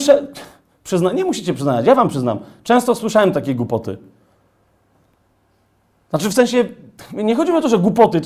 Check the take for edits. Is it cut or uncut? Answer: uncut